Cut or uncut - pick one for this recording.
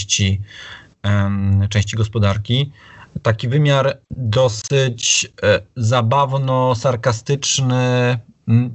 cut